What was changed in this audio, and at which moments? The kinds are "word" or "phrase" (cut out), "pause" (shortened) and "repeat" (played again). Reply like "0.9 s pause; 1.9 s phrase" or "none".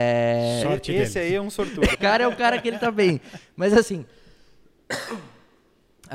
1.9 s word